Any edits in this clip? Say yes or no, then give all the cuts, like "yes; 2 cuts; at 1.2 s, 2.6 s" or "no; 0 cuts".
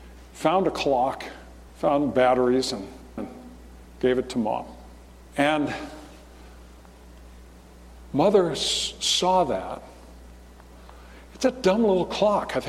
yes; 4 cuts; at 1.7 s, 3.2 s, 3.8 s, 5.1 s